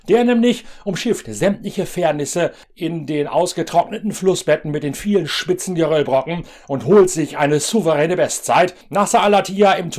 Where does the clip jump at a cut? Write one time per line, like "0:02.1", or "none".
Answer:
none